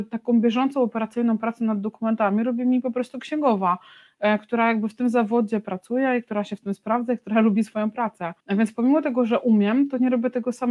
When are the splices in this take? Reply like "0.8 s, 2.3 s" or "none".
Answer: 8.4 s